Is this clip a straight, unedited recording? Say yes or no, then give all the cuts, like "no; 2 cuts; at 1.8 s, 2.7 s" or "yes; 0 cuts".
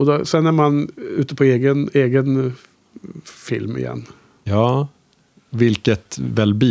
yes; 0 cuts